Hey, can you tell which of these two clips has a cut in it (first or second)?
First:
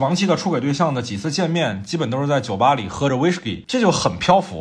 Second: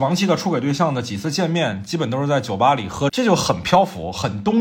second